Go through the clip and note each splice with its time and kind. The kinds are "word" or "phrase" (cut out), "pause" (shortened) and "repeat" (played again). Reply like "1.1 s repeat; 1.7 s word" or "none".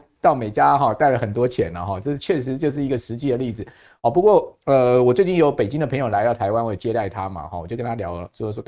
none